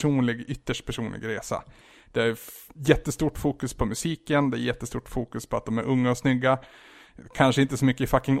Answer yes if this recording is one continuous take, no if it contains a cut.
yes